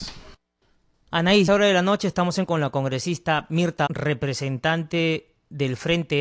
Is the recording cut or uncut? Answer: cut